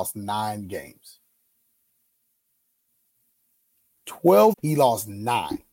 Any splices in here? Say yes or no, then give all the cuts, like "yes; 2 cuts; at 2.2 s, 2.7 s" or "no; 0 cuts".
yes; 1 cut; at 4.5 s